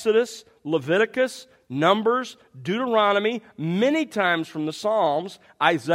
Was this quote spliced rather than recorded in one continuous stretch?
no; 0 cuts

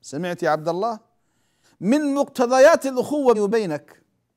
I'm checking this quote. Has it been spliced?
yes; 2 cuts; at 1.6 s, 3.3 s

